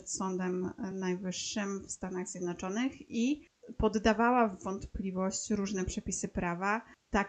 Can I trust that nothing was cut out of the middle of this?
yes; 0 cuts

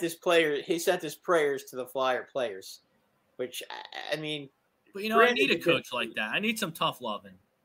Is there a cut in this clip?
no; 0 cuts

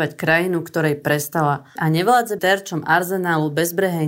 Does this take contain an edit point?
yes; 2 cuts; at 1.8 s, 2.4 s

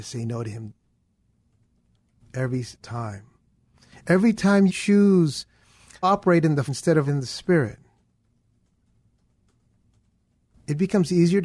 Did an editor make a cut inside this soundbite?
yes; 5 cuts; at 2.8 s, 4.7 s, 6.0 s, 6.7 s, 7.1 s

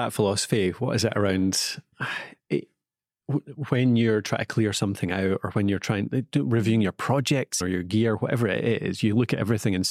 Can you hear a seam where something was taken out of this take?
yes; 1 cut; at 7.6 s

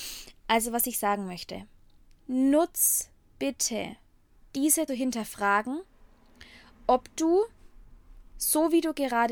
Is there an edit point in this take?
yes; 2 cuts; at 2.0 s, 4.9 s

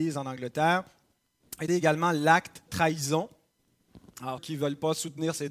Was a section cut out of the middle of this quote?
yes; 3 cuts; at 1.7 s, 2.7 s, 4.4 s

